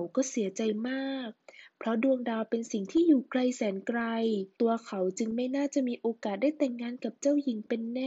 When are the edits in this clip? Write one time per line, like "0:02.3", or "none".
0:04.5